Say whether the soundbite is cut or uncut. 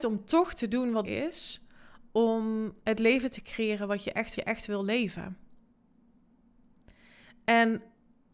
cut